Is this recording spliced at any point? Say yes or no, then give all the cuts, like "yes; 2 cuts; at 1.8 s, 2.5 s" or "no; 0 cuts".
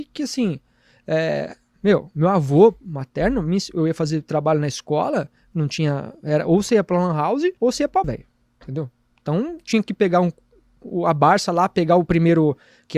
yes; 3 cuts; at 7.6 s, 8.0 s, 8.4 s